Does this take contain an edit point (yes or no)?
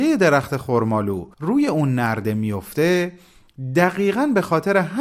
yes